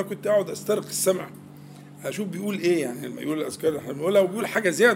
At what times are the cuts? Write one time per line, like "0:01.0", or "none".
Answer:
none